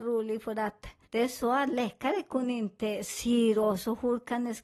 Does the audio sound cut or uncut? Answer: cut